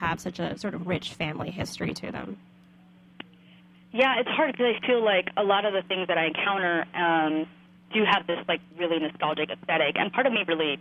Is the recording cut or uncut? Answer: uncut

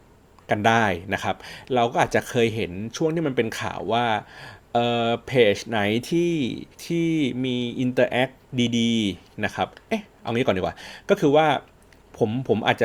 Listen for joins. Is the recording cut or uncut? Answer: cut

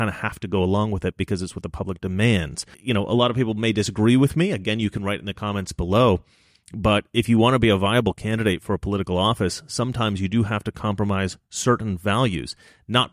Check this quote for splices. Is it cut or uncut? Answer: uncut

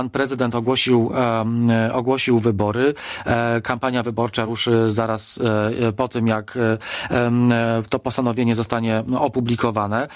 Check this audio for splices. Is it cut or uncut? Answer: uncut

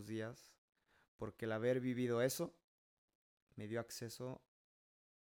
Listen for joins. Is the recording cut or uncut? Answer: uncut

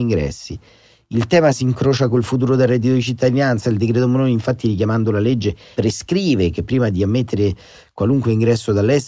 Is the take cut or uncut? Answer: uncut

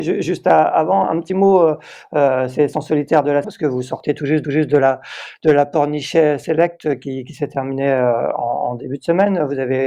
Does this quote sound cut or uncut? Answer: cut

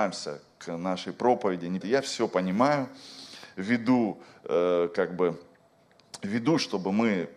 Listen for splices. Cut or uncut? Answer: cut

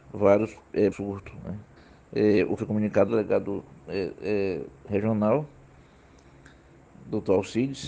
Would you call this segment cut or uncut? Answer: cut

